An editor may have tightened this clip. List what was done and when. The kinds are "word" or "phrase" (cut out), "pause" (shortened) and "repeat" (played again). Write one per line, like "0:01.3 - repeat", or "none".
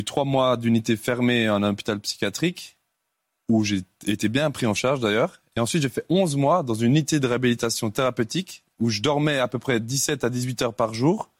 none